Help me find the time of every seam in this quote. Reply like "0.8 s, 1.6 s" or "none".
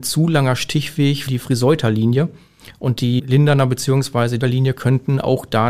1.3 s, 3.2 s, 4.4 s